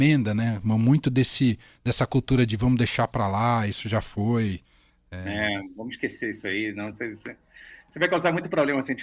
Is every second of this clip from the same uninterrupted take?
yes; 0 cuts

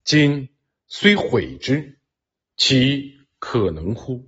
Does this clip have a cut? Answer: no; 0 cuts

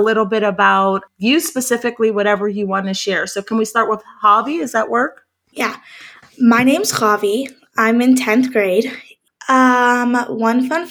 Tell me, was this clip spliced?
no; 0 cuts

